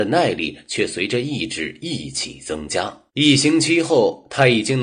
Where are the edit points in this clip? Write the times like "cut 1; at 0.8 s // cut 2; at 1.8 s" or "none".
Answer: cut 1; at 3.1 s